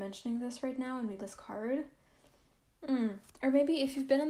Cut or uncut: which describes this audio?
cut